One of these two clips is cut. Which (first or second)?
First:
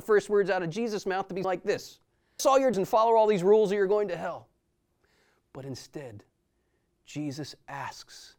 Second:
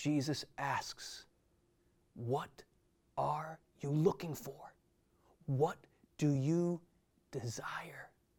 first